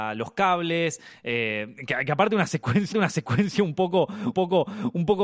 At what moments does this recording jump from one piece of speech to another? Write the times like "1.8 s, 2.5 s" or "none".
2.9 s, 4.3 s

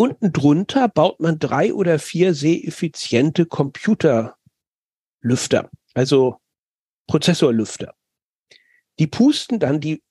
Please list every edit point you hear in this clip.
none

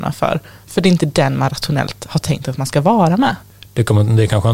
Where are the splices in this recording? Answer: none

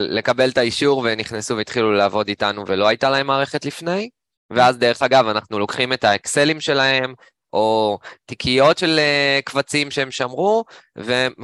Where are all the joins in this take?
none

